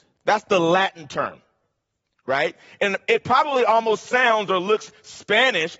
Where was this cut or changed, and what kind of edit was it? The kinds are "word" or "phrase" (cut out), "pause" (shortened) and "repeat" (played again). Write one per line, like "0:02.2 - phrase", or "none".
none